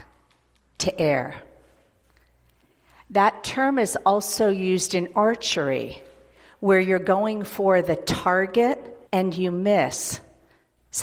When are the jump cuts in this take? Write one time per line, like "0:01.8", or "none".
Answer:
0:09.1